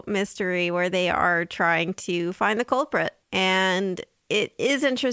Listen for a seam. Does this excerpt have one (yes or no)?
yes